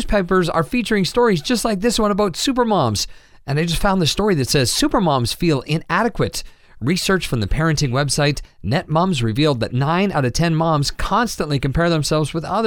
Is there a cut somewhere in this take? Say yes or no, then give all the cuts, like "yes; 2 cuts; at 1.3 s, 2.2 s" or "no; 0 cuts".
no; 0 cuts